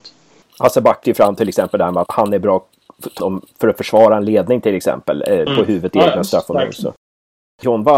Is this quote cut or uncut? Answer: cut